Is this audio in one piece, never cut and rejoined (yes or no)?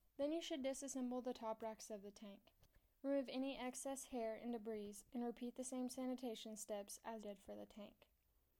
no